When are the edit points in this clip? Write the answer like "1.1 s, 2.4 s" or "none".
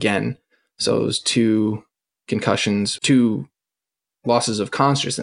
3.0 s